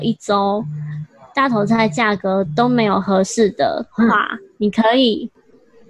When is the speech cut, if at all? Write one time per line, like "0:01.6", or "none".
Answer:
none